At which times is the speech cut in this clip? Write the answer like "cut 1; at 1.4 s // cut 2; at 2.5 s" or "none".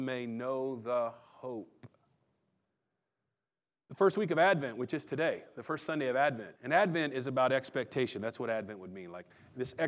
cut 1; at 6.6 s

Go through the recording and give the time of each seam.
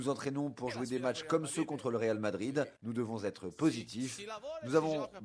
cut 1; at 2.8 s

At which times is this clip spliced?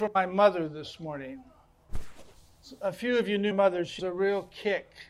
cut 1; at 3.5 s // cut 2; at 4.0 s

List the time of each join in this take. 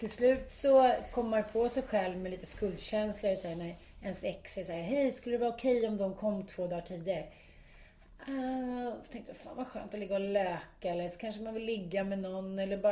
none

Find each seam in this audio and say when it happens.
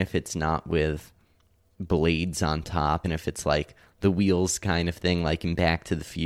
cut 1; at 3.0 s

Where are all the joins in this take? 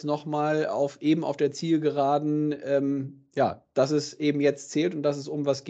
none

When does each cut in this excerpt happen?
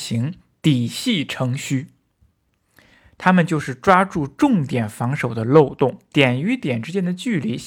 none

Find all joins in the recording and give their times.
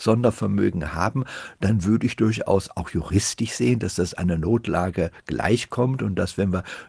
none

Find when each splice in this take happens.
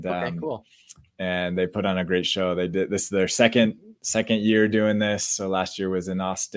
none

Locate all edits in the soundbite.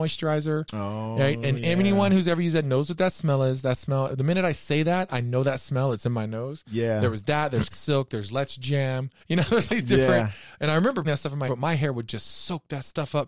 cut 1; at 7.7 s // cut 2; at 9.2 s // cut 3; at 9.7 s // cut 4; at 11.0 s // cut 5; at 11.5 s

